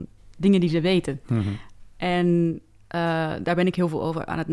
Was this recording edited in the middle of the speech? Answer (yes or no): no